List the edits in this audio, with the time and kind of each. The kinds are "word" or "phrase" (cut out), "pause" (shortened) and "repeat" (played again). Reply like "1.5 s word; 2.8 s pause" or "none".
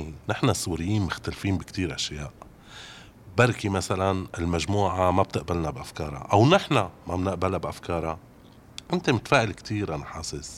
8.9 s pause